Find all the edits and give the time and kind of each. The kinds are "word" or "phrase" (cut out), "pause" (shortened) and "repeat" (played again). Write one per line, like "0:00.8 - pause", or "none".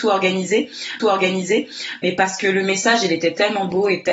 0:01.0 - repeat